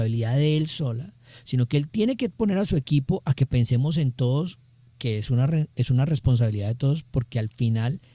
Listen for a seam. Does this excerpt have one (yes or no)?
no